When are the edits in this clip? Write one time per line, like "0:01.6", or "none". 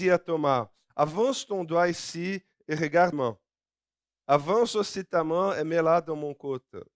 0:03.1